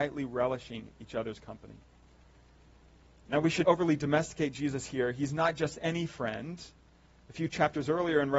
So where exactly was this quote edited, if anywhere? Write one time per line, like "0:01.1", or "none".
0:03.6